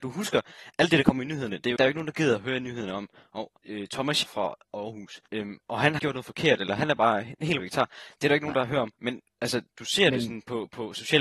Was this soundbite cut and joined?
yes; 8 cuts; at 1.8 s, 3.6 s, 4.2 s, 5.3 s, 6.0 s, 7.6 s, 9.0 s, 9.7 s

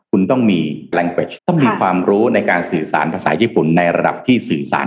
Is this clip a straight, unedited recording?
no; 2 cuts; at 0.9 s, 1.4 s

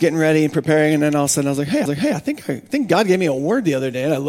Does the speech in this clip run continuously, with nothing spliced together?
no; 1 cut; at 1.9 s

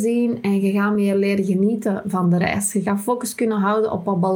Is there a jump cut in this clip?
no; 0 cuts

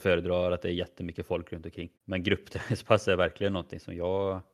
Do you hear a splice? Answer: yes; 1 cut; at 1.9 s

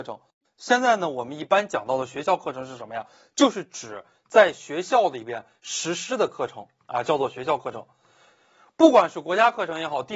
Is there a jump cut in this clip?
no; 0 cuts

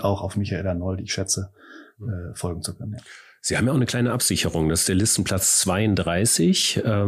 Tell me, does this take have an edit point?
no; 0 cuts

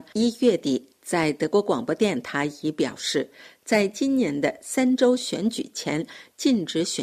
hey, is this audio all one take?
yes; 0 cuts

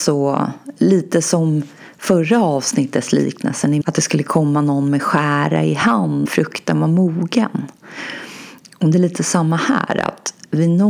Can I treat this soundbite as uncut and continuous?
no; 2 cuts; at 3.8 s, 6.3 s

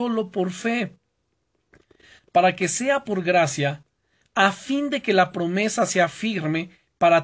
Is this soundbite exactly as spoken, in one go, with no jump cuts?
yes; 0 cuts

